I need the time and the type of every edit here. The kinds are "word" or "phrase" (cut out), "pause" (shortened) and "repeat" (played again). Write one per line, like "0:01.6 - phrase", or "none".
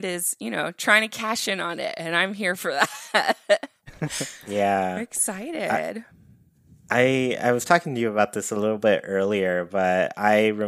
none